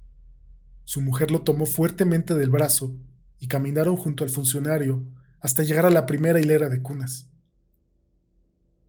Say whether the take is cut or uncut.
uncut